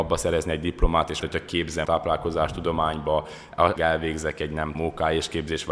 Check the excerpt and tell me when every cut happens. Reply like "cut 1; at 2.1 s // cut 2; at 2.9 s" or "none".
cut 1; at 1.2 s // cut 2; at 1.8 s // cut 3; at 3.8 s // cut 4; at 4.7 s